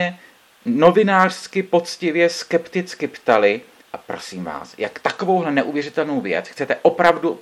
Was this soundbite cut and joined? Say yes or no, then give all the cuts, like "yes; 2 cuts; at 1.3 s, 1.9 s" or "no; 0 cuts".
yes; 1 cut; at 3.8 s